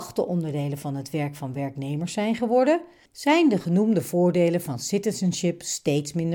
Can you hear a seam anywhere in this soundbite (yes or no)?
no